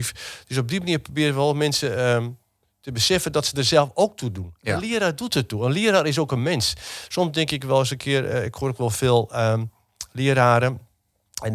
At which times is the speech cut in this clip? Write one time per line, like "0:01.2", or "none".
none